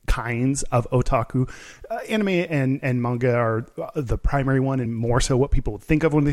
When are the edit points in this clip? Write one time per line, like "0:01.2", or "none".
0:04.9